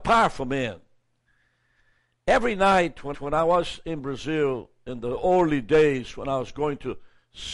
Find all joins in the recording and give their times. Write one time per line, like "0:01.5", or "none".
0:03.1